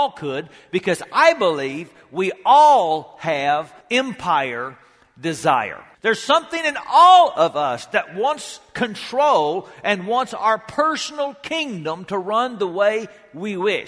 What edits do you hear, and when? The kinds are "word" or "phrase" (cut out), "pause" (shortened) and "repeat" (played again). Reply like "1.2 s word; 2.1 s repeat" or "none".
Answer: 3.8 s pause; 5.9 s pause